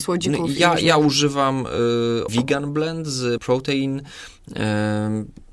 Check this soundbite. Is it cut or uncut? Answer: cut